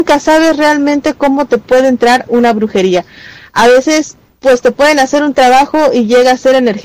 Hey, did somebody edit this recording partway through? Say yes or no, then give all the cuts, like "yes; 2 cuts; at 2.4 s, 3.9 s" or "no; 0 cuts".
no; 0 cuts